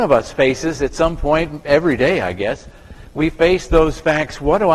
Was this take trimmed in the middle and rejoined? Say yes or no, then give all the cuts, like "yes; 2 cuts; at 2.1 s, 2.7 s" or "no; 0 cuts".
no; 0 cuts